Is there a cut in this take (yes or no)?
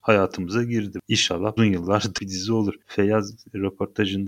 yes